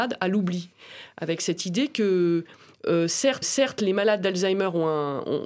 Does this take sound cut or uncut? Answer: cut